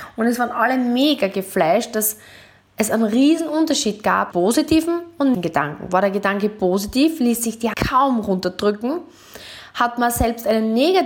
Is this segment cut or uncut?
cut